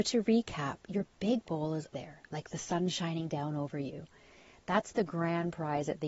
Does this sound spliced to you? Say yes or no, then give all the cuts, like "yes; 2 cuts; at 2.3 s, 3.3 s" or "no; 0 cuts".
yes; 2 cuts; at 1.5 s, 1.9 s